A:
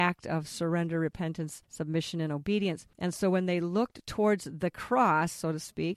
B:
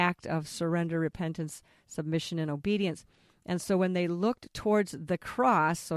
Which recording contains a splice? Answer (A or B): A